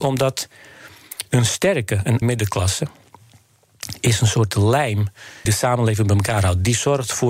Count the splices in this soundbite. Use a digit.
2